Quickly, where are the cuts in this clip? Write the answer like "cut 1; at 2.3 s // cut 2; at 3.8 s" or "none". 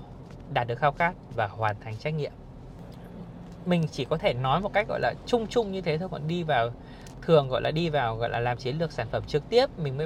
none